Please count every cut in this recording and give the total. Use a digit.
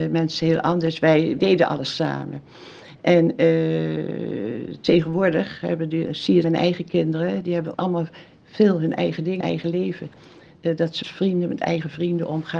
6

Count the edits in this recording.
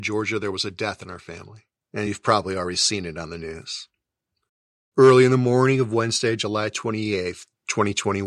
0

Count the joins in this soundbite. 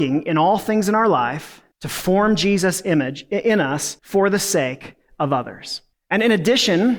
3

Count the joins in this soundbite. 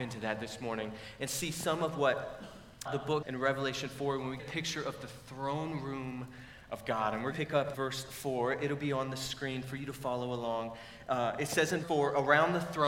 6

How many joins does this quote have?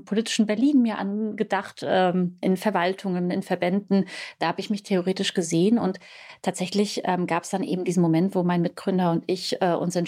0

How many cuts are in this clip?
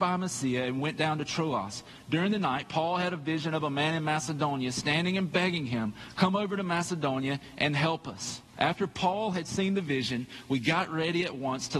1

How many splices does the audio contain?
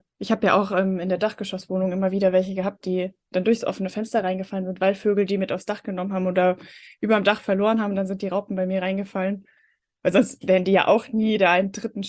0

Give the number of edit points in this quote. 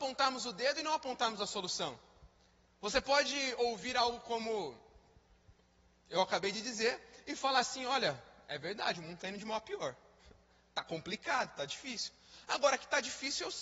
0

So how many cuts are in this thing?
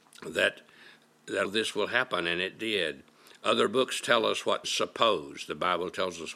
2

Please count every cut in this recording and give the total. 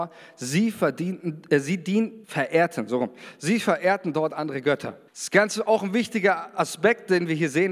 2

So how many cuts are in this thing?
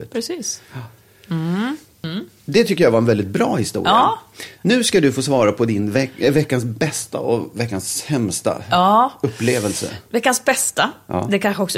0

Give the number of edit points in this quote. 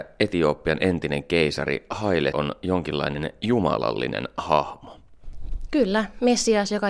1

